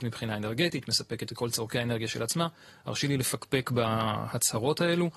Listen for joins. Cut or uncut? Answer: uncut